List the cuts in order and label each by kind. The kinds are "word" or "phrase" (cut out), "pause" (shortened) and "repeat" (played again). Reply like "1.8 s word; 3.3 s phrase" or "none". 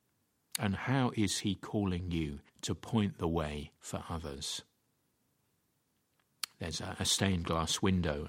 2.5 s pause; 3.8 s pause